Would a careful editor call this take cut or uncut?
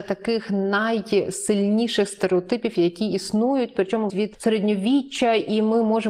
cut